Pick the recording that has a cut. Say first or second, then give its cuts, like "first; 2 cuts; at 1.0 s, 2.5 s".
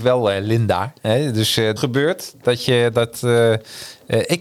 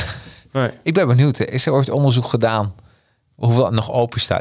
first; 1 cut; at 1.8 s